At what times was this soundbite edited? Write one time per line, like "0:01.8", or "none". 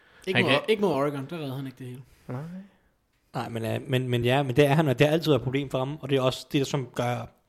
none